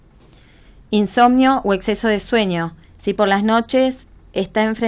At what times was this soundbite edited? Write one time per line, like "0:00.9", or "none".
0:02.9